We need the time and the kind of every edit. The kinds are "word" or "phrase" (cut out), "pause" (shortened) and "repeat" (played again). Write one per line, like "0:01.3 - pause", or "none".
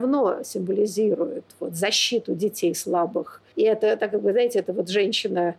0:03.5 - word